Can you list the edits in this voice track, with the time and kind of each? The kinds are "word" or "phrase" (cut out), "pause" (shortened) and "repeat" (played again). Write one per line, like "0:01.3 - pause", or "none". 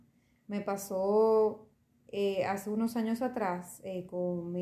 0:01.7 - pause